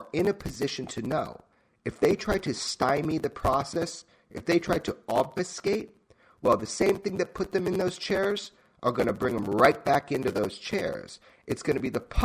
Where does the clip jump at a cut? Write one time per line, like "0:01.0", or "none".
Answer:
none

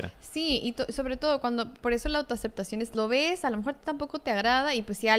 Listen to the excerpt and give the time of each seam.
0:02.9

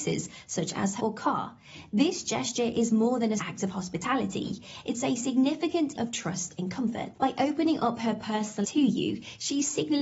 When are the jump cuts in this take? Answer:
0:01.0
0:03.4
0:06.0
0:08.6

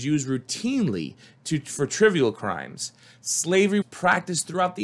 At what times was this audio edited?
0:03.8

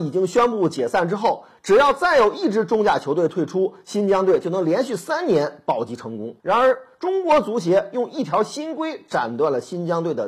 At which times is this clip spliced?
0:06.4

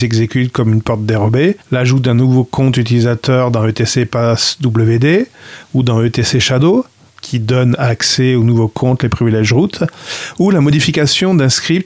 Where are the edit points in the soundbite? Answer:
0:01.6
0:07.1

